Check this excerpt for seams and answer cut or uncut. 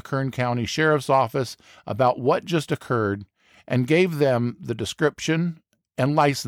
uncut